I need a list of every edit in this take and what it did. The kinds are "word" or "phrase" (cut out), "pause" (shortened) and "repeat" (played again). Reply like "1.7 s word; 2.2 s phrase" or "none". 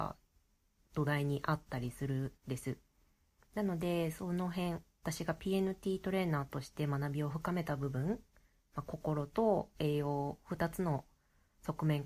2.4 s pause